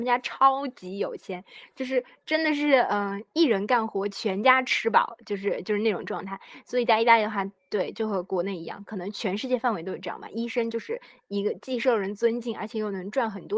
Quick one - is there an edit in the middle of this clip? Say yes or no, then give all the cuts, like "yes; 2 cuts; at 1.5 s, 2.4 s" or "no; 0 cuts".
no; 0 cuts